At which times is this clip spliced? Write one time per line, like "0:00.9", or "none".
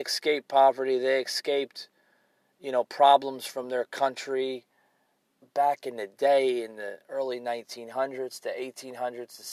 none